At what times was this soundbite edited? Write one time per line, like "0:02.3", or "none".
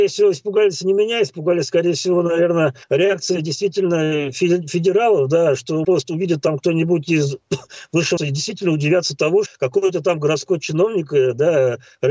0:02.8
0:05.8
0:08.2
0:09.5